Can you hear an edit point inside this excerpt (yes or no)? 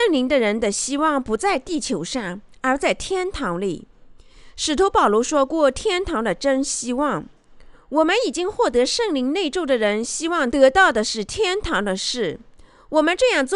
no